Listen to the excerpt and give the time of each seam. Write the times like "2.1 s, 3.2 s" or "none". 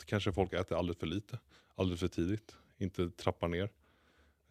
none